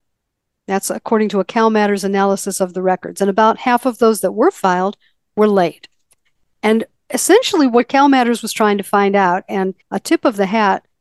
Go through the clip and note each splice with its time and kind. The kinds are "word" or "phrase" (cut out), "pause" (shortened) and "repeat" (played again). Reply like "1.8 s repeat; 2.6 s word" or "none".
9.8 s pause